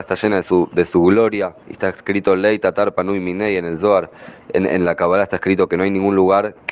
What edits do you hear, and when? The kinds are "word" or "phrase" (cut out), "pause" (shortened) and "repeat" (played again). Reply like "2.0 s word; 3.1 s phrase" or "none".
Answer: 1.6 s pause